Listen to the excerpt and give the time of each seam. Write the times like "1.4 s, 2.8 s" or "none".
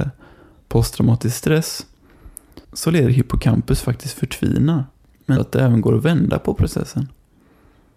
2.6 s, 3.1 s, 5.4 s